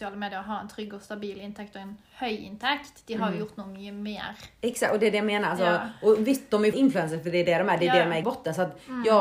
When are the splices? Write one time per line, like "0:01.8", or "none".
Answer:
0:06.7
0:08.2